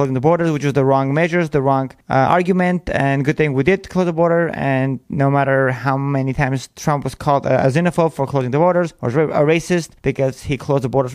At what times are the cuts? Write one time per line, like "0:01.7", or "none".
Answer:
0:02.0
0:10.0